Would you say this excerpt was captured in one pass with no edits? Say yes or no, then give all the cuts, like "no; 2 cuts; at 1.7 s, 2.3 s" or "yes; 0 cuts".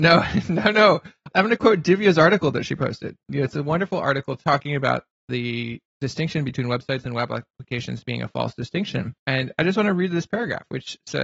no; 1 cut; at 9.2 s